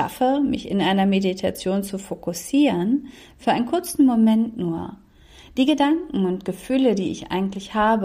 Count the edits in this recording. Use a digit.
0